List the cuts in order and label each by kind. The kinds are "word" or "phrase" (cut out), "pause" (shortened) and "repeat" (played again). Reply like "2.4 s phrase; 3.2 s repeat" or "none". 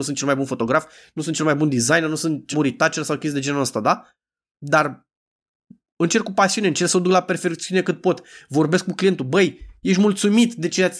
2.5 s word